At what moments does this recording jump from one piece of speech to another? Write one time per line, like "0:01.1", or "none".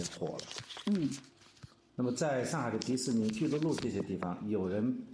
none